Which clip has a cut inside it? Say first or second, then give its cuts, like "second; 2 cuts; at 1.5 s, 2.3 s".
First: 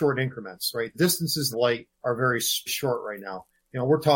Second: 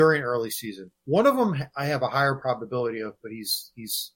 first; 4 cuts; at 0.9 s, 1.5 s, 1.9 s, 2.7 s